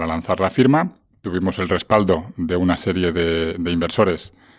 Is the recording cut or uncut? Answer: uncut